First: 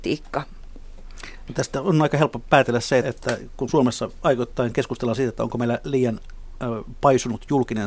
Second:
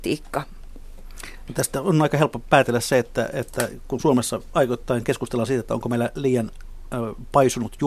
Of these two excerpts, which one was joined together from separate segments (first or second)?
first